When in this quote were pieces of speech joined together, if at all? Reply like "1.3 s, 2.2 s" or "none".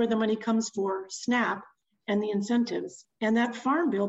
none